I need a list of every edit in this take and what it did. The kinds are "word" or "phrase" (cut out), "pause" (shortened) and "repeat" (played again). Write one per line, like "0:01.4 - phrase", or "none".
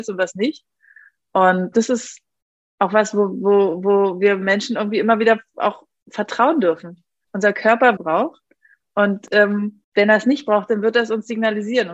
0:01.7 - phrase
0:08.0 - phrase
0:09.8 - pause